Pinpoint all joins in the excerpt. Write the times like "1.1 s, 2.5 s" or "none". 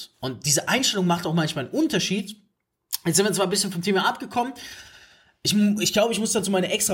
none